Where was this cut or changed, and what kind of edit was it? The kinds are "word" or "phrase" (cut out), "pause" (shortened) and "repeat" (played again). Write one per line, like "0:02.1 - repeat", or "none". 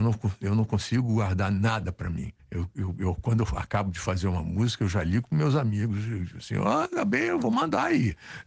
0:02.4 - pause